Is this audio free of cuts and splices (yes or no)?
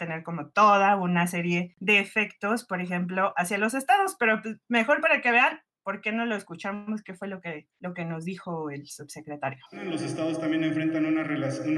no